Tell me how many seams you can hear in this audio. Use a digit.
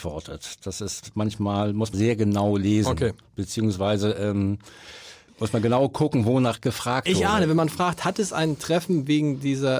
2